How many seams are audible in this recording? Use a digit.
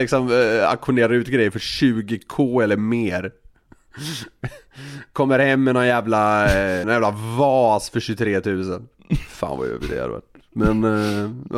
1